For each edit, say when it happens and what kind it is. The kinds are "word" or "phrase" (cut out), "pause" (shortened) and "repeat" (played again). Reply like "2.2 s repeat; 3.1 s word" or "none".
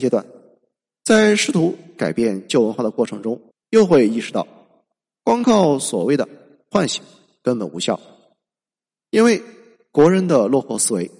3.5 s pause